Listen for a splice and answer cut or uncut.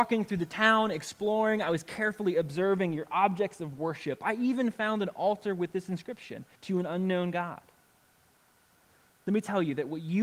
cut